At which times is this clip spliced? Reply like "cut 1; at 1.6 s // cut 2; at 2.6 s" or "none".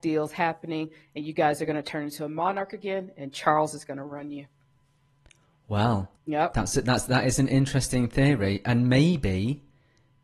cut 1; at 6.2 s